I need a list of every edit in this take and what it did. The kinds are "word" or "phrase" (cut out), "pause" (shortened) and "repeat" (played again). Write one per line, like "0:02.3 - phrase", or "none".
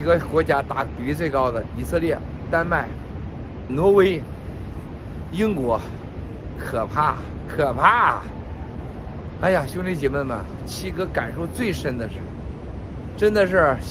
0:03.7 - word